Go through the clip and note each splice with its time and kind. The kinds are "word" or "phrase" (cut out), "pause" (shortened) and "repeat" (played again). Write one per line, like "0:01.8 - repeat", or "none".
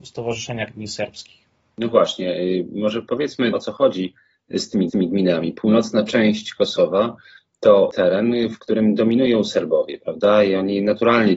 0:03.5 - word
0:04.9 - repeat